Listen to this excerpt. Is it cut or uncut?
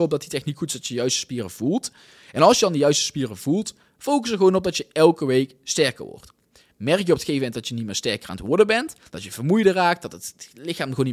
uncut